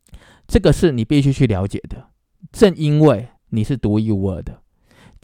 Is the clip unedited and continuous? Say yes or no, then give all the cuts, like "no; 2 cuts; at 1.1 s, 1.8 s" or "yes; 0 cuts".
no; 1 cut; at 3.4 s